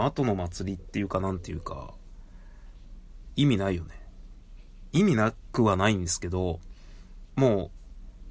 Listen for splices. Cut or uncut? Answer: cut